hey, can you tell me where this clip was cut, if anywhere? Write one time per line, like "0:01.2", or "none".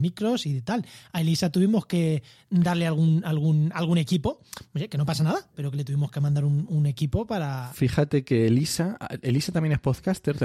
none